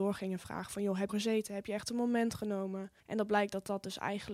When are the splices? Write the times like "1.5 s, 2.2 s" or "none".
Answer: 1.1 s, 3.0 s

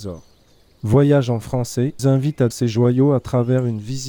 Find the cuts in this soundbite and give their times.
2.0 s, 2.5 s

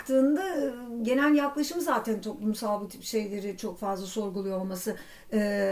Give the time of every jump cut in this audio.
none

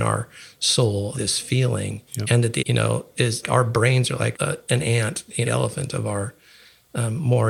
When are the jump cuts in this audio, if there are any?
1.1 s, 2.1 s, 2.6 s, 3.4 s, 4.3 s, 5.5 s

